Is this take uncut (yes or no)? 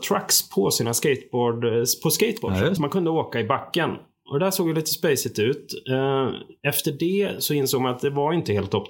no